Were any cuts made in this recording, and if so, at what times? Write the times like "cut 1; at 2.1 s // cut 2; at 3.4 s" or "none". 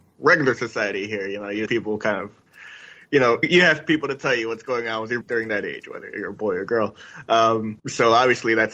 cut 1; at 1.7 s // cut 2; at 3.4 s // cut 3; at 5.2 s